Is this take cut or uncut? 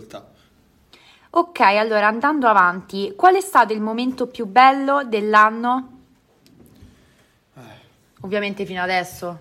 uncut